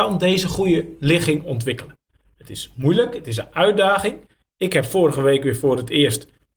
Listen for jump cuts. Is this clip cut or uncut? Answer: uncut